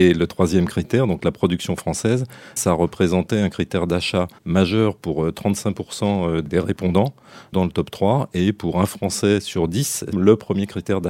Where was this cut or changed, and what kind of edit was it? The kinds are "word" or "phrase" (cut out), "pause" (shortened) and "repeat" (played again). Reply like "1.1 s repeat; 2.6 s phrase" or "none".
2.6 s word; 4.4 s pause; 7.5 s word; 10.1 s phrase